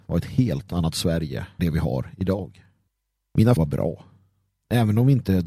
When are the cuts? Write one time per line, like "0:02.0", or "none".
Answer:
0:01.6
0:03.6